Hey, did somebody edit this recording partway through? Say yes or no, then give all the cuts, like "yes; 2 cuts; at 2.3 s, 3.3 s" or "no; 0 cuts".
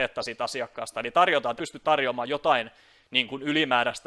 yes; 1 cut; at 1.6 s